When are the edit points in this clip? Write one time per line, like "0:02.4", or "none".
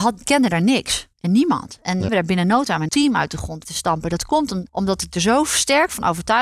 0:01.1
0:02.1
0:02.9
0:03.6
0:04.7